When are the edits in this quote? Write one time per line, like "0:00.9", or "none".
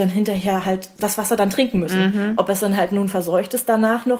none